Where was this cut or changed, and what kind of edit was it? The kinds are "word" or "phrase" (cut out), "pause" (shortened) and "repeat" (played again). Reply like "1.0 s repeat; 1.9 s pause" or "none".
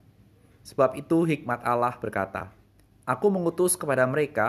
none